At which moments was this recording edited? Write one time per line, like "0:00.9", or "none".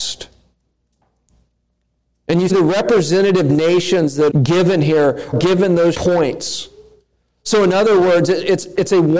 0:02.5
0:04.3
0:05.3
0:05.9